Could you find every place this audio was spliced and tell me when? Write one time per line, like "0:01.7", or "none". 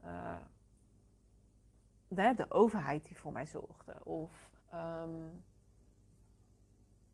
0:04.6